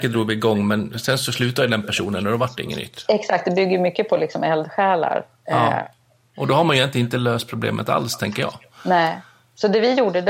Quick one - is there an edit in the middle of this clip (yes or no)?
no